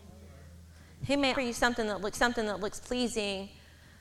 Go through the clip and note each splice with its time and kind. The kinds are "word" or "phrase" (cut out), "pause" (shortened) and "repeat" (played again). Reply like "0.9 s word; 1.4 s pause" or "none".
1.3 s word; 2.1 s repeat

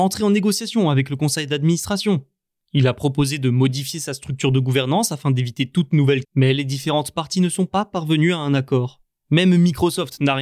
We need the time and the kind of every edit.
6.2 s word

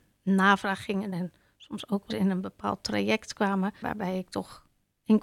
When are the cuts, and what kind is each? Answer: 1.1 s word; 2.1 s word; 3.8 s word

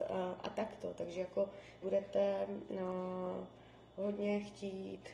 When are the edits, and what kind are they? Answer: 1.8 s phrase

